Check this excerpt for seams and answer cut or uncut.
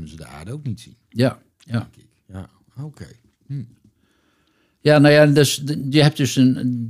uncut